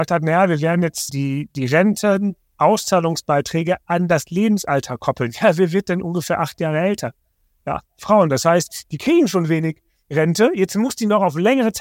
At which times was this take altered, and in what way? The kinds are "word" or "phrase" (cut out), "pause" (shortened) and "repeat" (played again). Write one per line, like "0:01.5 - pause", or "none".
0:01.1 - phrase